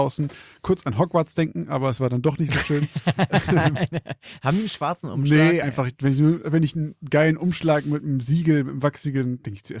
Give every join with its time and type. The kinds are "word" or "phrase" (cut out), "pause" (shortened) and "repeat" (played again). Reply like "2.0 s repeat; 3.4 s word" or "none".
5.6 s word